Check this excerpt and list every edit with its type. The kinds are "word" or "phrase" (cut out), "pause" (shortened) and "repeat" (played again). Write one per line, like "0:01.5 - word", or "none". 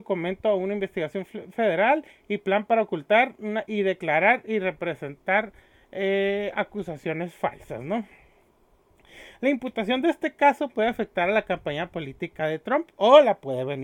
none